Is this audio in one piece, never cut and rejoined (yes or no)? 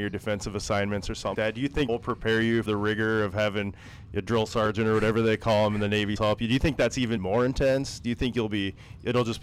no